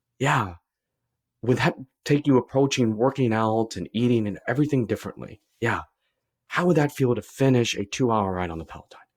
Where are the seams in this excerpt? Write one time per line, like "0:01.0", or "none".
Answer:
none